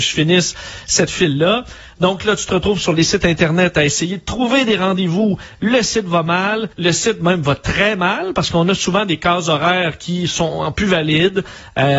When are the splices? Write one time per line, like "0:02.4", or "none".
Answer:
0:06.7